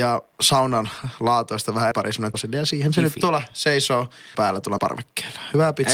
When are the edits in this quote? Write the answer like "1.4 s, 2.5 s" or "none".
1.9 s, 2.3 s, 4.3 s, 4.8 s